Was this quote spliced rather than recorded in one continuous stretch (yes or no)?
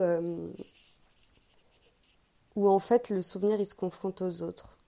no